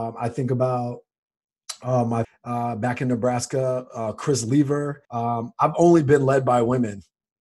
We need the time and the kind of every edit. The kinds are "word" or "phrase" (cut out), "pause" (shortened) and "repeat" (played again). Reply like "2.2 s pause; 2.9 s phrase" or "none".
2.2 s phrase; 5.0 s pause